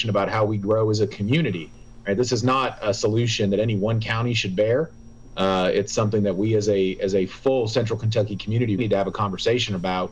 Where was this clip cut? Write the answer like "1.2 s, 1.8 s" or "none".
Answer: 8.8 s